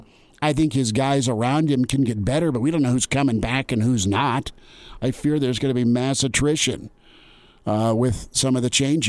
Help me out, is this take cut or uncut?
uncut